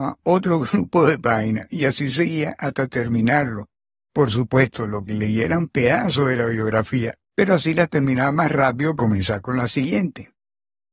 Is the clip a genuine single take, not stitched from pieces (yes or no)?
no